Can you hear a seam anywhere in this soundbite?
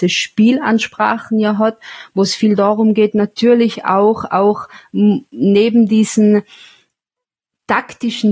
no; 0 cuts

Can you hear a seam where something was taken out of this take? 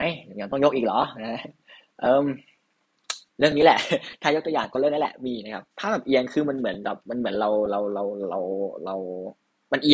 yes; 2 cuts; at 3.3 s, 5.7 s

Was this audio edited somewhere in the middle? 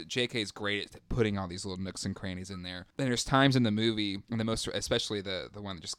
yes; 2 cuts; at 2.9 s, 4.2 s

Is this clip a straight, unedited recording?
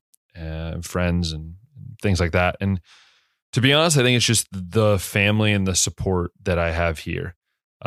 yes; 0 cuts

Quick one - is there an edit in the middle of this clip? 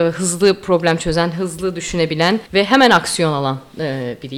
yes; 1 cut; at 2.5 s

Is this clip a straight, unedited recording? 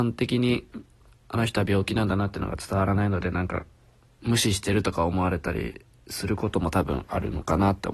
yes; 0 cuts

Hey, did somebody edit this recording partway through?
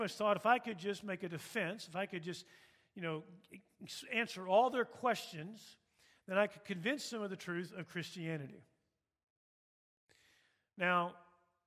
no; 0 cuts

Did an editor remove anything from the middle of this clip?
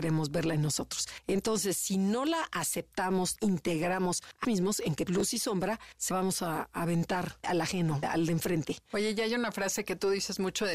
yes; 6 cuts; at 3.4 s, 4.4 s, 5.1 s, 6.1 s, 7.4 s, 8.0 s

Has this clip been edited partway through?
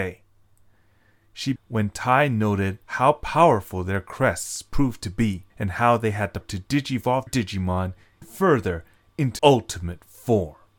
yes; 7 cuts; at 1.6 s, 2.8 s, 5.5 s, 6.4 s, 7.3 s, 8.2 s, 9.4 s

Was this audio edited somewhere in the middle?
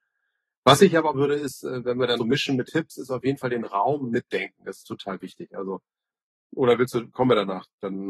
yes; 3 cuts; at 1.1 s, 2.2 s, 2.7 s

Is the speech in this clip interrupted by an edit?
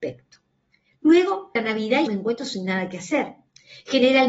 yes; 2 cuts; at 1.6 s, 2.1 s

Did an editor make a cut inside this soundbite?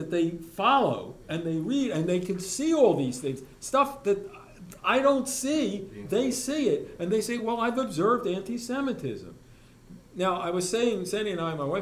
no; 0 cuts

